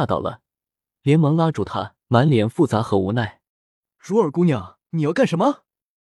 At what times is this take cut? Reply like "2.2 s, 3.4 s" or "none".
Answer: 2.0 s, 3.5 s, 4.8 s

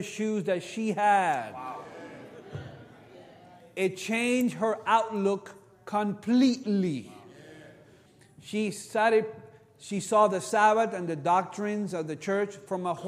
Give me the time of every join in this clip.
none

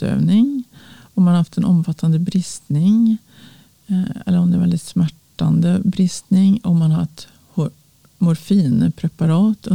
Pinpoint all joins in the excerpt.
none

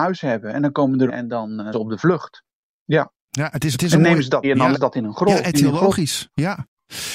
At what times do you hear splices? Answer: 1.1 s, 1.7 s, 3.7 s, 4.4 s, 4.7 s, 5.5 s

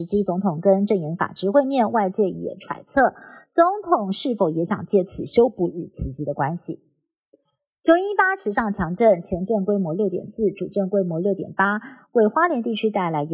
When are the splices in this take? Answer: none

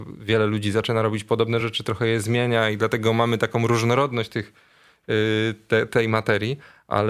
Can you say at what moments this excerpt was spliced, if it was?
none

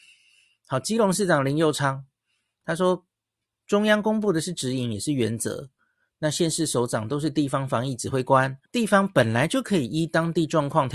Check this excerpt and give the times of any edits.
8.7 s

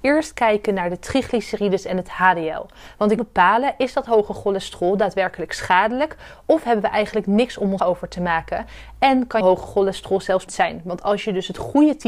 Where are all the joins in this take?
3.2 s, 7.8 s, 9.4 s, 10.5 s

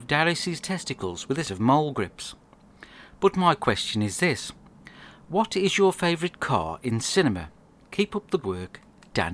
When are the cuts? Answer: 1.4 s, 8.4 s

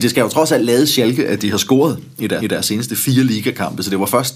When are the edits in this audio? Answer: 2.4 s

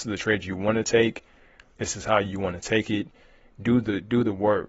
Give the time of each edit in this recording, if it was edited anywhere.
none

